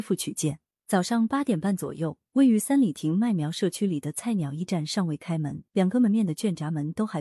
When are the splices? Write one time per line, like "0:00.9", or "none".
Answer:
0:05.7